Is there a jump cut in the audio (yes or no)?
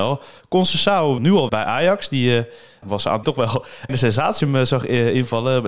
yes